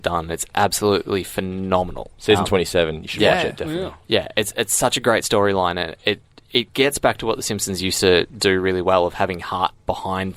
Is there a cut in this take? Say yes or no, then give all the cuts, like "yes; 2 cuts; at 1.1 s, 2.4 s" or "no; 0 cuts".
no; 0 cuts